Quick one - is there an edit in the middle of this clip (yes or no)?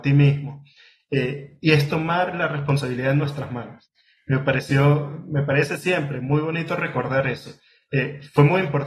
no